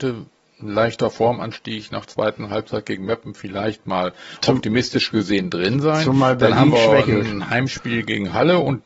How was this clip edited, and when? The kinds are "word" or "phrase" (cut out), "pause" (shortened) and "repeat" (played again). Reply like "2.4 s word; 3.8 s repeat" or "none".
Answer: 2.1 s word